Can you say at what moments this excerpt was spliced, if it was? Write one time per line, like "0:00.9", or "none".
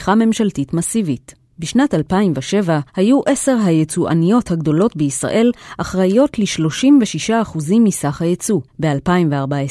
0:01.4
0:02.9
0:08.7